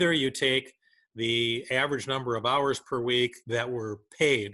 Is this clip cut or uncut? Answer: uncut